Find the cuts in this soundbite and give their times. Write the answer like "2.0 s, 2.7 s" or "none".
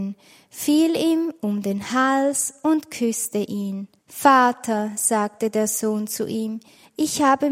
4.0 s